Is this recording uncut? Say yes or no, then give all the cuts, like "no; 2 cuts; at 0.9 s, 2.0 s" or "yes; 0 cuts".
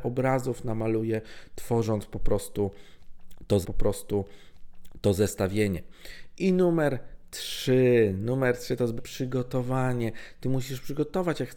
no; 2 cuts; at 3.6 s, 9.0 s